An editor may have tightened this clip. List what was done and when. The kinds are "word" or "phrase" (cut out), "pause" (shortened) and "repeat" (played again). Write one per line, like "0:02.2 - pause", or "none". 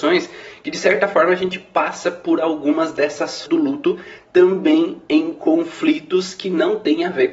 0:03.5 - word